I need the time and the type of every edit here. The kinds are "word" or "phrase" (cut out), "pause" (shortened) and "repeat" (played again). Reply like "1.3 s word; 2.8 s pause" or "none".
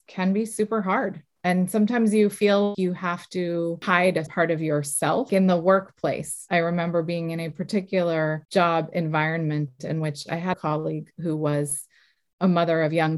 2.7 s word; 4.3 s word; 10.5 s word